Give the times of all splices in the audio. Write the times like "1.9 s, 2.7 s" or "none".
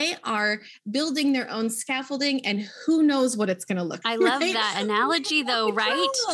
4.0 s